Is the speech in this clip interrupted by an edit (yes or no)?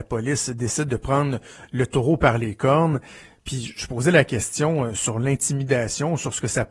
no